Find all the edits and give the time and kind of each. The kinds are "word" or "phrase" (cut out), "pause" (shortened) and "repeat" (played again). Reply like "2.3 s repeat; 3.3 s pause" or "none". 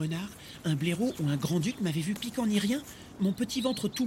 2.2 s phrase; 3.2 s word